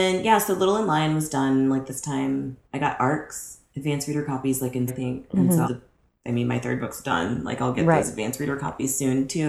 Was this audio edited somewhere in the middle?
yes; 3 cuts; at 2.6 s, 4.9 s, 5.6 s

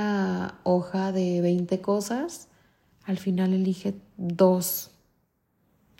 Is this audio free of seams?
yes; 0 cuts

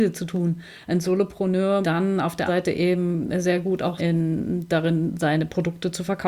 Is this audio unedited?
no; 3 cuts; at 1.8 s, 2.5 s, 4.0 s

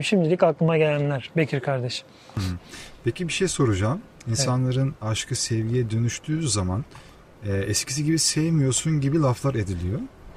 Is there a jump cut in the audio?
no; 0 cuts

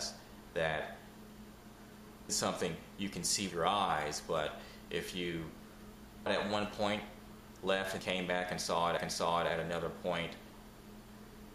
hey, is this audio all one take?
no; 5 cuts; at 2.3 s, 3.5 s, 6.3 s, 8.0 s, 9.0 s

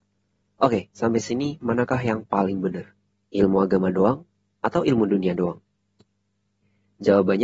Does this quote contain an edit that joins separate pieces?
no; 0 cuts

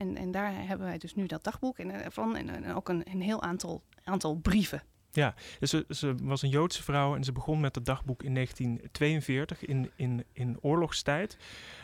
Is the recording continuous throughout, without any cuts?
yes; 0 cuts

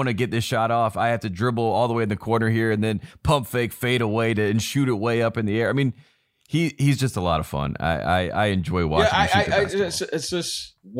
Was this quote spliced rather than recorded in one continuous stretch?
no; 0 cuts

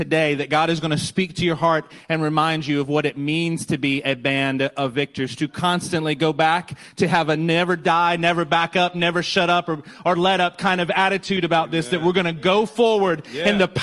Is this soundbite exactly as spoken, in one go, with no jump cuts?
yes; 0 cuts

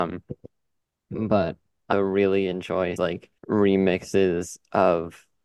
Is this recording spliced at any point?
yes; 3 cuts; at 1.9 s, 3.0 s, 3.4 s

